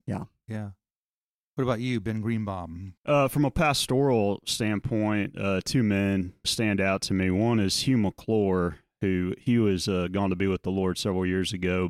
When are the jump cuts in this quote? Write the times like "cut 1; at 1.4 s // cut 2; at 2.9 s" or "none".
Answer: cut 1; at 3.0 s // cut 2; at 6.4 s